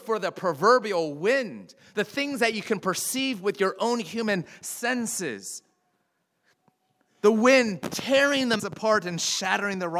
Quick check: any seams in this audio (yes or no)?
yes